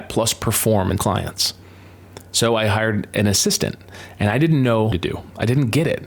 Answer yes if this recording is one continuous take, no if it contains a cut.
no